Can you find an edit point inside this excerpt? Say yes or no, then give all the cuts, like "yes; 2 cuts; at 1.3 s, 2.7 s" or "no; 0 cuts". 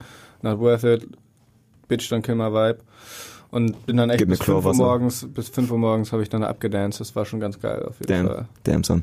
no; 0 cuts